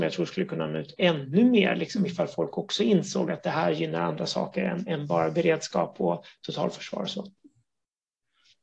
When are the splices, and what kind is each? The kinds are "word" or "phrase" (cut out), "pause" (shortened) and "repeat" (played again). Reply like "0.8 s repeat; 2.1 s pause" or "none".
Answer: none